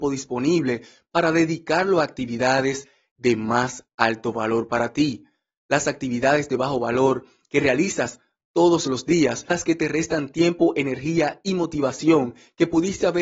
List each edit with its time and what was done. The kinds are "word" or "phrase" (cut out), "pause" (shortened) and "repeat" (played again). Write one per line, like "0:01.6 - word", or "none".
0:09.5 - word